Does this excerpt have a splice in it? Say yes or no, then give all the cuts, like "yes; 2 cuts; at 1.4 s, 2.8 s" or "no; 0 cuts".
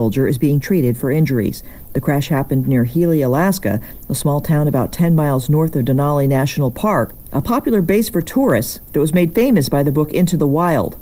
no; 0 cuts